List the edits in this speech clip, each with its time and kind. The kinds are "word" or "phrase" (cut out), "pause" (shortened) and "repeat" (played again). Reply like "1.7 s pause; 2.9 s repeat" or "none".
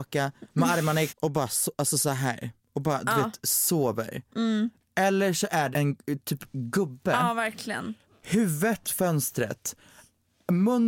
1.1 s word; 5.7 s word; 8.8 s word